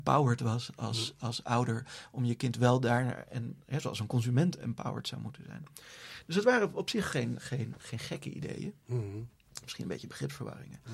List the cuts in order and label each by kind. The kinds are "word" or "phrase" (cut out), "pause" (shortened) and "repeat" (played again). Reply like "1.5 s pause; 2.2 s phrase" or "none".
none